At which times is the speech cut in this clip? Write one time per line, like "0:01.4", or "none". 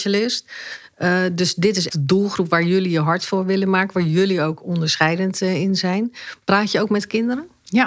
0:01.9